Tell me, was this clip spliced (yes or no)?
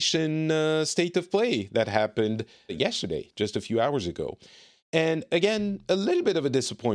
yes